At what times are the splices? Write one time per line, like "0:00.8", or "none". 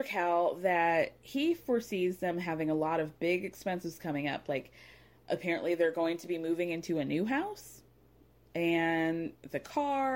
none